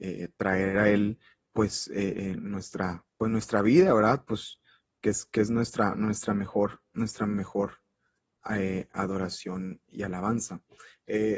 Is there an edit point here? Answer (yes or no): yes